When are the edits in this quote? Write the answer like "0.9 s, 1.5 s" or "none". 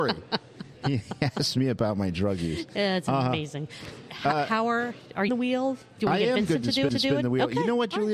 5.3 s, 6.9 s